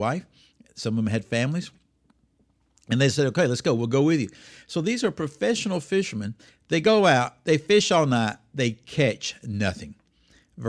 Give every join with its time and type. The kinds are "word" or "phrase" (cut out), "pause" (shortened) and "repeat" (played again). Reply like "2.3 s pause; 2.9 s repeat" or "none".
none